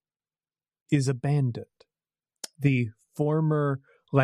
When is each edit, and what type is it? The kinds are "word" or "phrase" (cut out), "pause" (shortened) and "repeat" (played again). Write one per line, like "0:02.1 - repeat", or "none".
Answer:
none